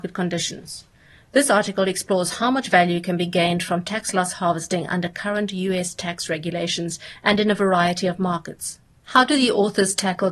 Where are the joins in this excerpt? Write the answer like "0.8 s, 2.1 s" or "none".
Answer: 8.9 s